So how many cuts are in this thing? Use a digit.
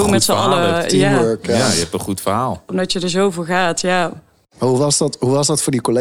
0